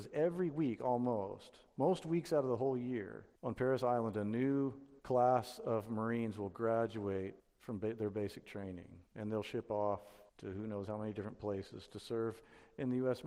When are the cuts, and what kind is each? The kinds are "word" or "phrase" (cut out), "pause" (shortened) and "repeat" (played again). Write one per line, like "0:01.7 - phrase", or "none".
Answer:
0:03.4 - pause
0:05.0 - pause
0:07.4 - pause
0:09.1 - pause
0:10.3 - pause